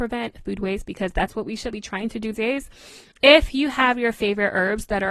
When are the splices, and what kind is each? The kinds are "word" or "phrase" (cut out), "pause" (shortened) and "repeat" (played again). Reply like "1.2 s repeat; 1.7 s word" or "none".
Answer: 1.7 s word; 2.3 s word